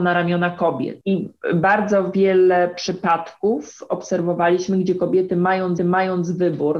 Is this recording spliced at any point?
yes; 1 cut; at 5.8 s

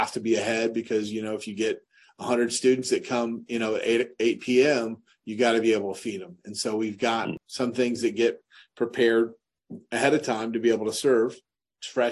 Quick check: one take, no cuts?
yes; 0 cuts

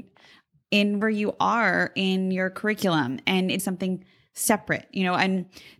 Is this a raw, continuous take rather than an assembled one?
no; 2 cuts; at 1.0 s, 3.6 s

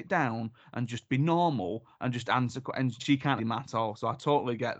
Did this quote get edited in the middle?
yes; 2 cuts; at 3.0 s, 3.4 s

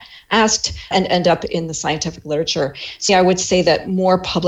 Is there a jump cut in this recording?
yes; 2 cuts; at 0.9 s, 3.1 s

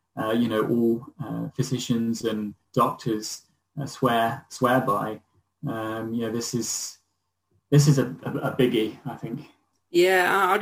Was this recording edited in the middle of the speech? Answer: no; 0 cuts

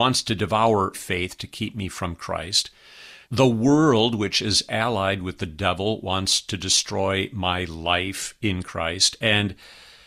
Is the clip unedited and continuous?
no; 2 cuts; at 0.9 s, 3.2 s

